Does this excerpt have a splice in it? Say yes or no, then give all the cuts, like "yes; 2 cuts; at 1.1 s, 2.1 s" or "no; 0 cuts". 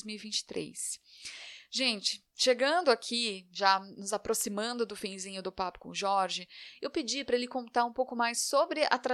no; 0 cuts